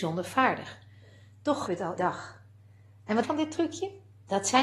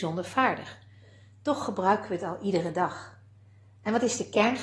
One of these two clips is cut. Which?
first; 3 cuts; at 1.7 s, 2.0 s, 3.2 s

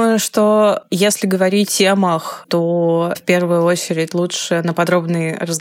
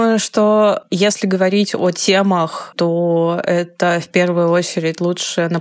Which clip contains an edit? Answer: first; 2 cuts; at 1.7 s, 3.1 s

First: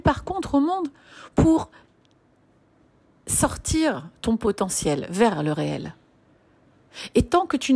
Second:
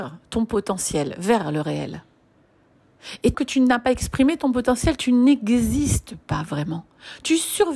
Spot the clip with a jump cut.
second; 1 cut; at 3.3 s

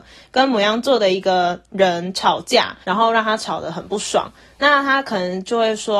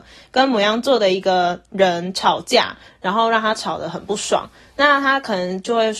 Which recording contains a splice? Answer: first; 1 cut; at 2.8 s

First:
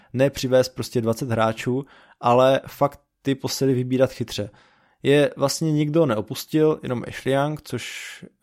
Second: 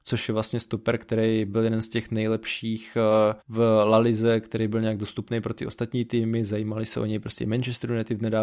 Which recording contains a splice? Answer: second; 1 cut; at 3.4 s

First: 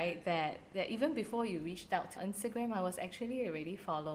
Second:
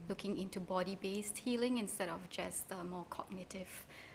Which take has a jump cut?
first; 1 cut; at 2.1 s

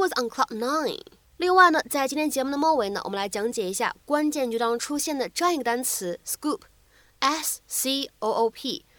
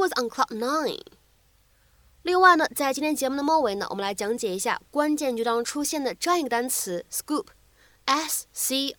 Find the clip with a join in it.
first; 1 cut; at 1.2 s

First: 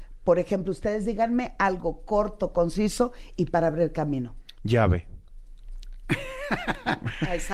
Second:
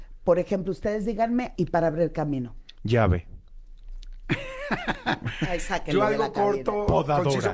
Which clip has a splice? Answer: second; 1 cut; at 1.6 s

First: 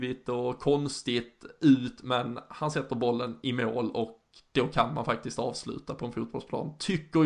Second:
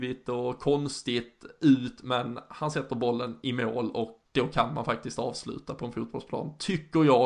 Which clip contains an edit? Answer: second; 1 cut; at 4.3 s

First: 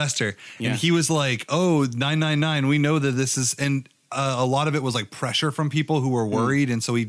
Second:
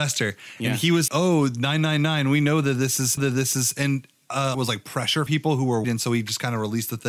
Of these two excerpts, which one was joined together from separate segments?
second; 5 cuts; at 1.1 s, 3.2 s, 4.5 s, 5.3 s, 5.8 s

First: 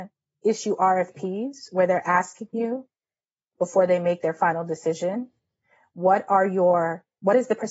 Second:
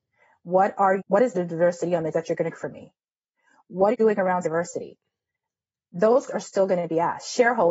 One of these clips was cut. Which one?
second; 7 cuts; at 1.0 s, 1.3 s, 2.1 s, 2.5 s, 3.9 s, 4.4 s, 6.3 s

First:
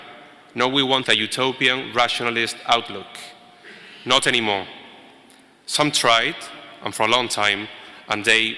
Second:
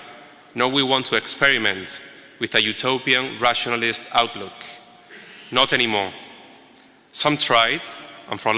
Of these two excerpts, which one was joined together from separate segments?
first; 1 cut; at 1.0 s

